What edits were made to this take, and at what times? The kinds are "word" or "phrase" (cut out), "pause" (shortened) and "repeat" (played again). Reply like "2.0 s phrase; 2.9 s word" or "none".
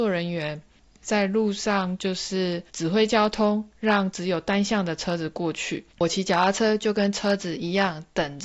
2.7 s pause; 5.9 s pause